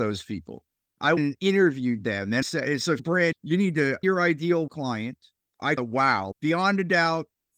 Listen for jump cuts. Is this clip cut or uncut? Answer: cut